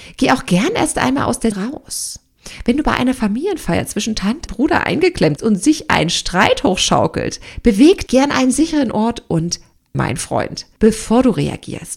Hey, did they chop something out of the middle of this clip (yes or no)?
yes